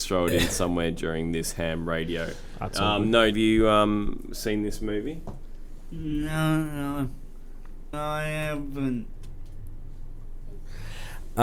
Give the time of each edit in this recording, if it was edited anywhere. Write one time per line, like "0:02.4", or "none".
0:03.3
0:07.9